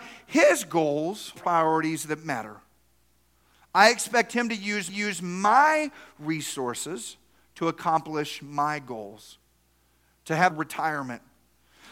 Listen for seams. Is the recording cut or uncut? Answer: cut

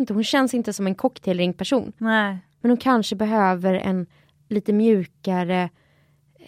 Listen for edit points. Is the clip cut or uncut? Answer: uncut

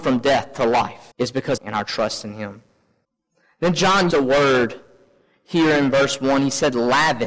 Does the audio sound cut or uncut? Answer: cut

